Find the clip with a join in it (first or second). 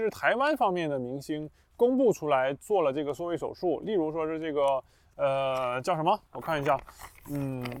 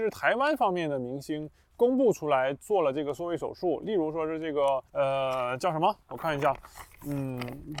second